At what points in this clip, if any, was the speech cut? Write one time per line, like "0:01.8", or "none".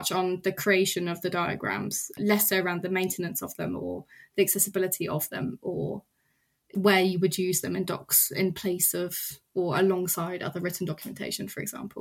none